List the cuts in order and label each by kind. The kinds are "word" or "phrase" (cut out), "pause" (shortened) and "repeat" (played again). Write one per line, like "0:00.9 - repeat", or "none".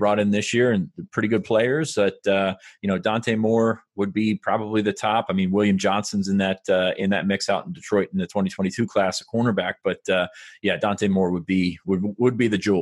none